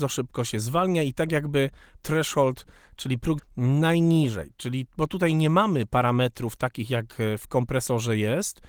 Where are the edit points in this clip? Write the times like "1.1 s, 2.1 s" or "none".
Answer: 2.0 s, 3.4 s